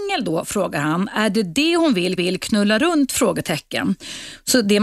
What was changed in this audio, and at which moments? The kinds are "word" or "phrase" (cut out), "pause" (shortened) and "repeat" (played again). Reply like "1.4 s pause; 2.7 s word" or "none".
2.2 s repeat